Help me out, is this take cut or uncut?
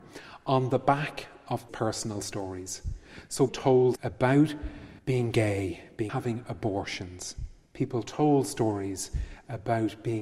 cut